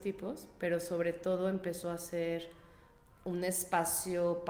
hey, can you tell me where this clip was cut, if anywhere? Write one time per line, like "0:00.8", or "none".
none